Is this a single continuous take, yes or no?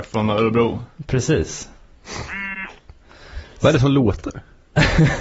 yes